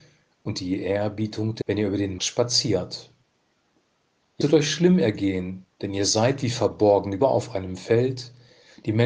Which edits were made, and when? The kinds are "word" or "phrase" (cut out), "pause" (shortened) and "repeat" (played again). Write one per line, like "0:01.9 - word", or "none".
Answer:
0:01.6 - word
0:02.2 - word
0:04.4 - word
0:05.7 - pause
0:07.2 - word

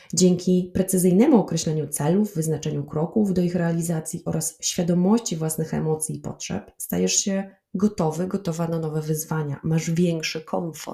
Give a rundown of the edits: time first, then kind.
none

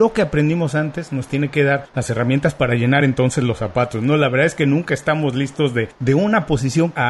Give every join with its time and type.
none

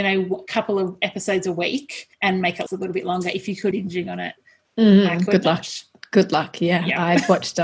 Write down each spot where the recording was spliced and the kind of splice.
0:02.1 - pause
0:02.7 - word
0:03.7 - phrase

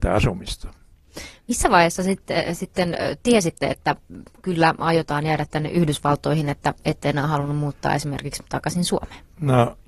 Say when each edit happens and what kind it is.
none

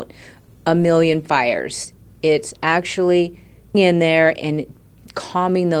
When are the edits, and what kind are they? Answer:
0:03.7 - word

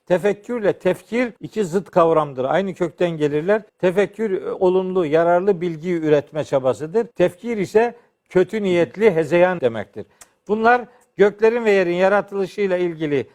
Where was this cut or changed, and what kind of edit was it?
0:01.4 - pause
0:03.7 - pause
0:07.1 - pause
0:09.6 - word

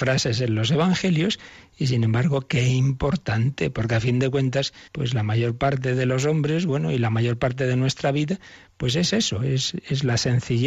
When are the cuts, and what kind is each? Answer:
0:04.9 - pause

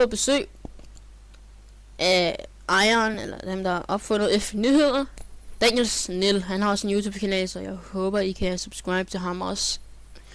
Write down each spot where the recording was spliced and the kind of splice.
none

